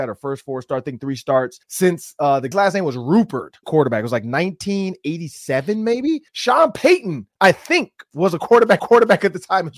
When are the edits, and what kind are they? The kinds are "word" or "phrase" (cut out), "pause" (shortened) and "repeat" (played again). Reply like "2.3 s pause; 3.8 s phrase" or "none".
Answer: 1.6 s pause; 2.5 s word; 3.6 s phrase; 6.3 s pause; 8.8 s repeat